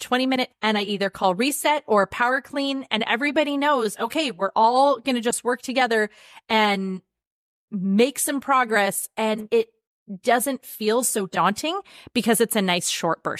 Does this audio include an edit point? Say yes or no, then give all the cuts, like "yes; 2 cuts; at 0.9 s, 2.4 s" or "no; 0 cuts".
no; 0 cuts